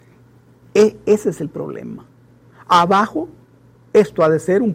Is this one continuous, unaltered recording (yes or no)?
yes